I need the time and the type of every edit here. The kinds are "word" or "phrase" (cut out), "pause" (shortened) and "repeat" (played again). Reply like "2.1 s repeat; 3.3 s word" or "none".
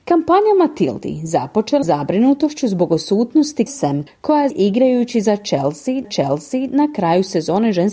1.8 s word; 3.7 s word; 4.1 s word; 4.5 s phrase; 6.0 s repeat